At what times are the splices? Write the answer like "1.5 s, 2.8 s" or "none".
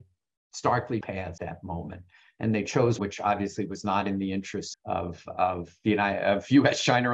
1.0 s, 1.4 s, 3.0 s, 4.7 s